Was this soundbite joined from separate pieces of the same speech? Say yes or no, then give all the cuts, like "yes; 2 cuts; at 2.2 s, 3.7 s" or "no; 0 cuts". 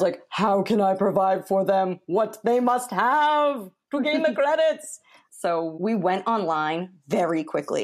no; 0 cuts